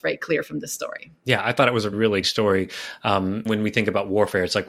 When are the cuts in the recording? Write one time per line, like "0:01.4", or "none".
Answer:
0:01.9
0:02.2
0:03.5